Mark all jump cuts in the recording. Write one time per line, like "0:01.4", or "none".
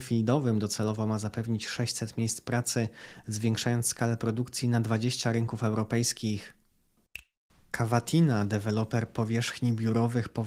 none